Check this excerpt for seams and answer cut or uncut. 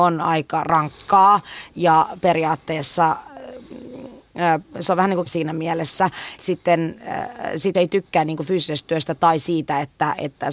cut